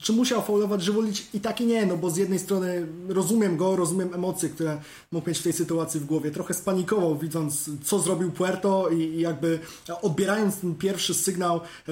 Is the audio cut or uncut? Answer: uncut